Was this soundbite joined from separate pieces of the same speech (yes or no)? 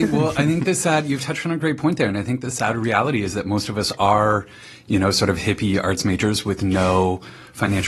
no